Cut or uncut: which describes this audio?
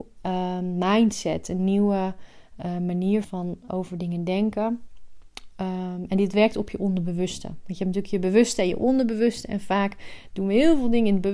cut